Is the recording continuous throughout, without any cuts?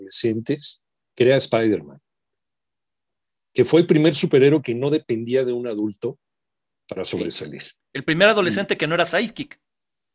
yes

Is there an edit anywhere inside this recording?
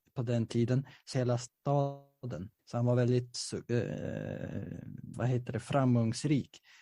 yes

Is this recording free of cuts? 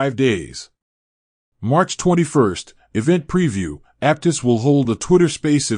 yes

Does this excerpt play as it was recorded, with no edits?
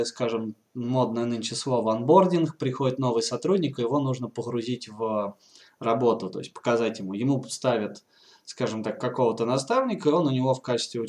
yes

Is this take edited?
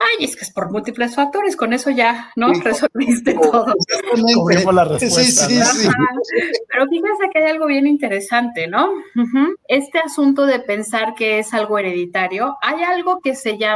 yes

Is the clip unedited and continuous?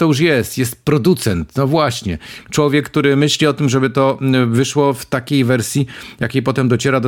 yes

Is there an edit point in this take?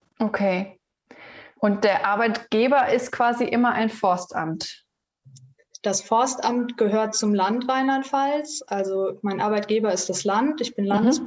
no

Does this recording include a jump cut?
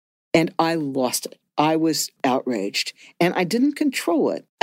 yes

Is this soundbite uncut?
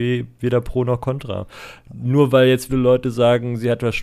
no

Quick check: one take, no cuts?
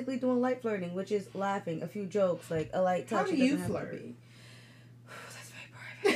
yes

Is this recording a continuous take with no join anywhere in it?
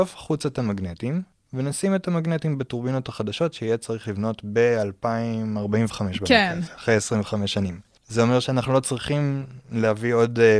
no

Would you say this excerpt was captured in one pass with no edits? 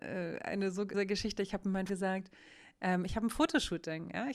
no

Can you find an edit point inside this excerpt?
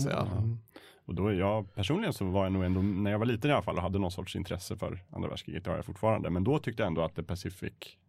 no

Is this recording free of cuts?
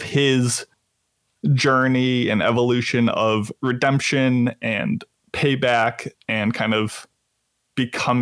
yes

